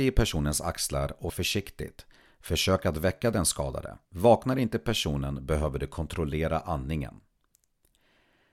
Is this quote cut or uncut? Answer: cut